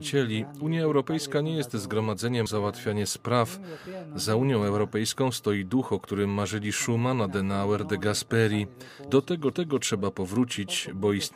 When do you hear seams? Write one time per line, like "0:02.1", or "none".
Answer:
0:02.5
0:09.5

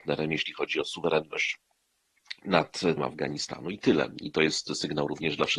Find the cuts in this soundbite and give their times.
0:03.0

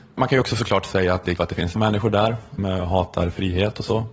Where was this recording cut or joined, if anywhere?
0:01.4
0:01.8
0:02.6

